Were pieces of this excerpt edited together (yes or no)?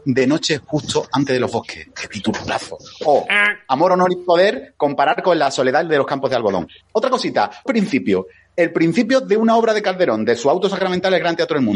yes